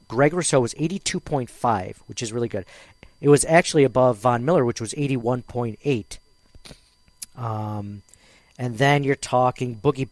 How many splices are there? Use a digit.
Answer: 0